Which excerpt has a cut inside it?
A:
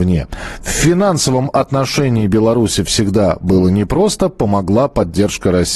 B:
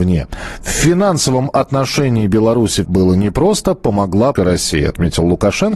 B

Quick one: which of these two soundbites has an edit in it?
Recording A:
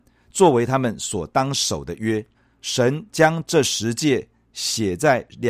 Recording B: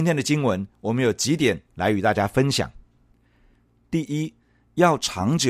A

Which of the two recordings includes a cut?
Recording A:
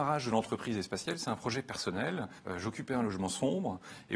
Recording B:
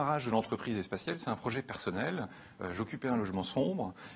A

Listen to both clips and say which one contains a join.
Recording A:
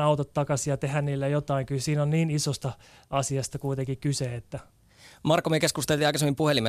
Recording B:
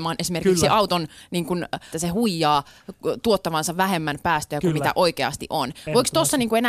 B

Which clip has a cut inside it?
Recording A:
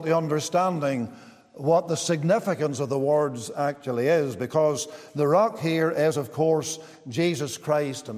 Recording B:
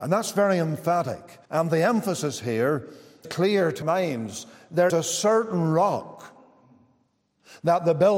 B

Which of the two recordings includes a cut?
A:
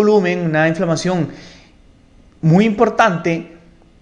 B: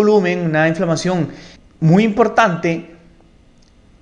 B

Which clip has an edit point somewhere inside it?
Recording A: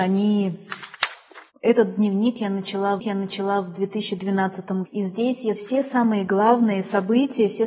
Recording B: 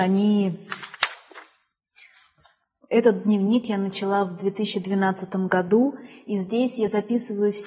A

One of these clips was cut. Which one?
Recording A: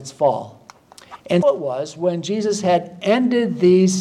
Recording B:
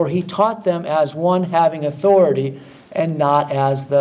A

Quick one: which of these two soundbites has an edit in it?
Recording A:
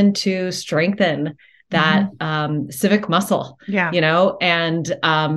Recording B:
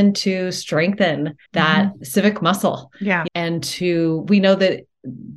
B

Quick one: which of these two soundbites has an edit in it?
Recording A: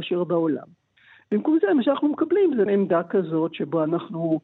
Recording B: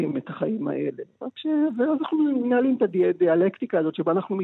A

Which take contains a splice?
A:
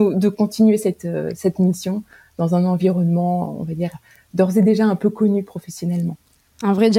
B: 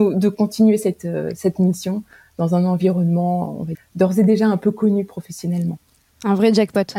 B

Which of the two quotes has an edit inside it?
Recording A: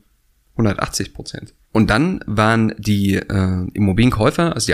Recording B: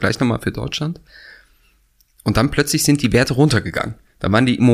A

